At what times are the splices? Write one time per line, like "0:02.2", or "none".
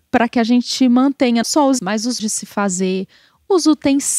0:01.4
0:01.8
0:02.2